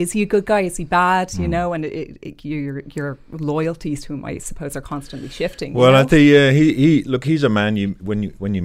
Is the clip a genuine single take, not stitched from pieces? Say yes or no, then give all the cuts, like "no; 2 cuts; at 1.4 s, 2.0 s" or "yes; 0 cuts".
yes; 0 cuts